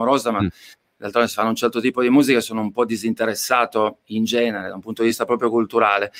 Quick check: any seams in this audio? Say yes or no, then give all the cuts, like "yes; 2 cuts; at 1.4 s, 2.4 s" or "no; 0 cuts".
no; 0 cuts